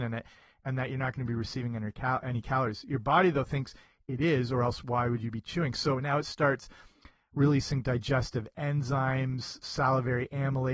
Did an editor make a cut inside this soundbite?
no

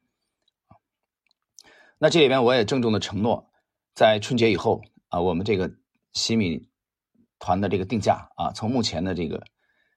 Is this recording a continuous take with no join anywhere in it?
yes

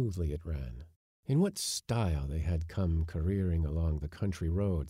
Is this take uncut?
yes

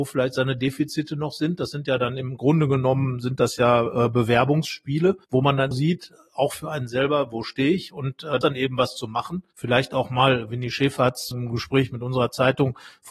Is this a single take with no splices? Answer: no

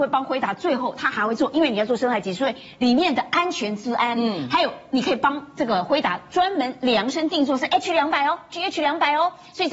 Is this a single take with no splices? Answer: yes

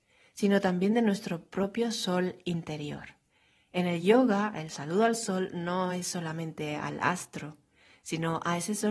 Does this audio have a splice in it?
no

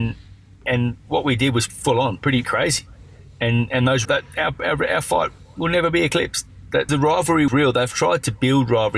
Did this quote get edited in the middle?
yes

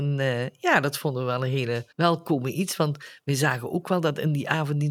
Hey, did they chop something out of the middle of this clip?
yes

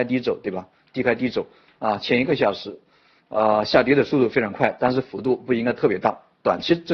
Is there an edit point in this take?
no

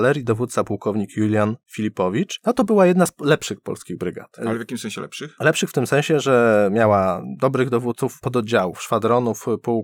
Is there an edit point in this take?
no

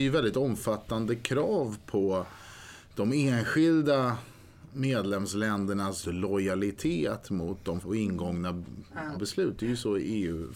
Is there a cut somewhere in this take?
yes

